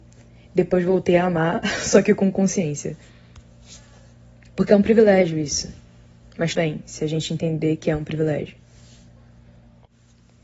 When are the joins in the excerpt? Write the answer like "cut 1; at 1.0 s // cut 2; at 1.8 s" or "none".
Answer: cut 1; at 6.6 s